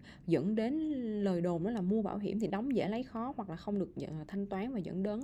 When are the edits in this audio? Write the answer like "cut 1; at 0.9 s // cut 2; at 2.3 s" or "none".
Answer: none